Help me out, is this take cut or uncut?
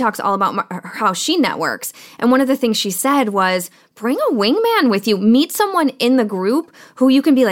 uncut